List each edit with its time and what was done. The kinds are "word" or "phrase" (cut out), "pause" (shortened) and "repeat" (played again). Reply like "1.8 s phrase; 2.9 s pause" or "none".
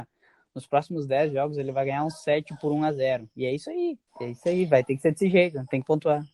4.1 s pause

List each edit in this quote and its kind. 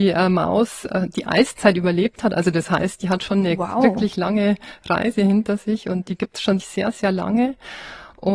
6.6 s word

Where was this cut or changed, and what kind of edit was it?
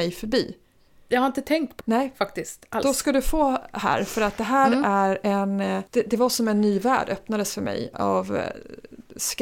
1.8 s word; 5.9 s pause

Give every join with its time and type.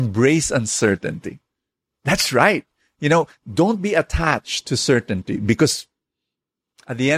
none

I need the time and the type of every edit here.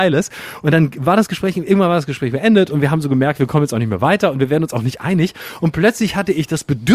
none

